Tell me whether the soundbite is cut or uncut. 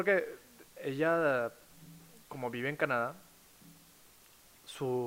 uncut